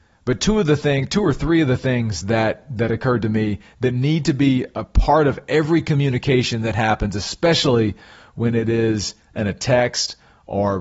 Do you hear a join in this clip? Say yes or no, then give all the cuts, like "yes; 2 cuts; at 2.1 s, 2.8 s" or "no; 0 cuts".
no; 0 cuts